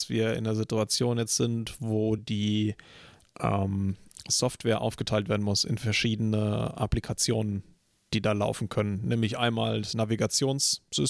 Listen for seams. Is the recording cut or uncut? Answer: uncut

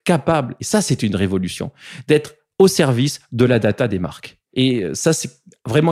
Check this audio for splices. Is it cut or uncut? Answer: uncut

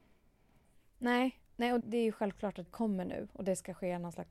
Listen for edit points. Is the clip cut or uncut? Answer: cut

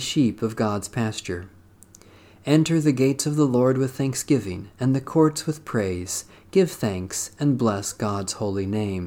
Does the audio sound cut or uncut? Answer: uncut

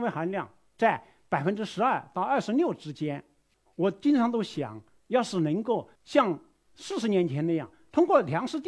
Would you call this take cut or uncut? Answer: cut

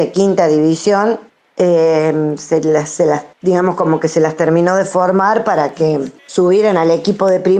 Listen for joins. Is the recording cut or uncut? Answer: cut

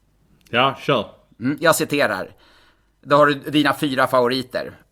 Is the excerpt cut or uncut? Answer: uncut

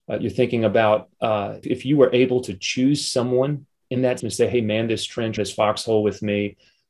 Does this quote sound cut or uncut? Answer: cut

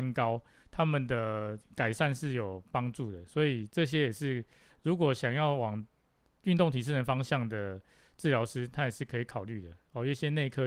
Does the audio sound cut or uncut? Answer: uncut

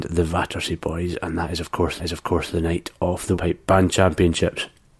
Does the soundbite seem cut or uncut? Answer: cut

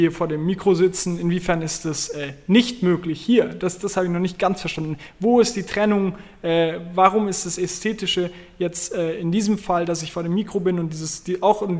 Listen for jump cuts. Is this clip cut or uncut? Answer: uncut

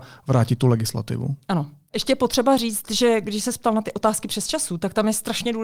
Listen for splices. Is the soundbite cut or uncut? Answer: uncut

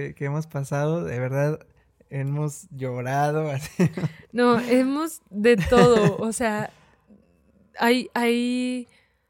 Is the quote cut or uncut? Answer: uncut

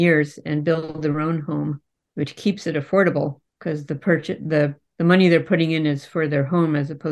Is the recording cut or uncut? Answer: cut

